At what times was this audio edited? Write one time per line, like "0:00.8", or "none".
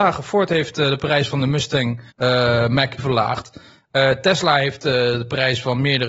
0:02.1
0:03.0